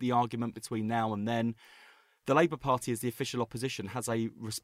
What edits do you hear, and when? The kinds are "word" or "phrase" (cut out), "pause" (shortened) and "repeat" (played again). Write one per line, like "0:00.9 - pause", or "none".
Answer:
none